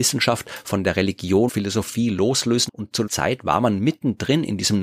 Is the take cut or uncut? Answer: cut